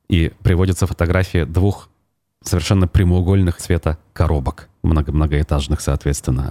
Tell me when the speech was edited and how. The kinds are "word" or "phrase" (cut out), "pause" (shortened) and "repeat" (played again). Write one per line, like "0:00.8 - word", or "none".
0:03.6 - phrase